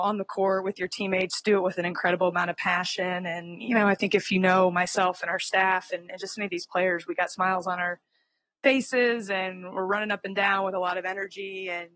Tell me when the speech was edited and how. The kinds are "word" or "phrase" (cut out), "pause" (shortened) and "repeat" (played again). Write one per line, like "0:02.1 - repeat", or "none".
none